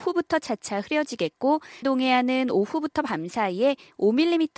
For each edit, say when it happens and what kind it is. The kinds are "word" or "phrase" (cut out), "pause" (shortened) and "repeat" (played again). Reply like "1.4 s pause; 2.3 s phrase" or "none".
1.8 s word